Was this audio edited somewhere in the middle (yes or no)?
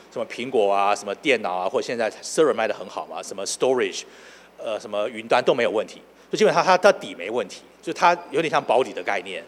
no